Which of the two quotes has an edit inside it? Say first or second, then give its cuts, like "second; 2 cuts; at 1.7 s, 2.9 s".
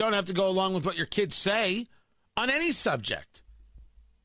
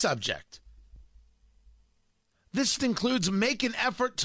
second; 1 cut; at 2.8 s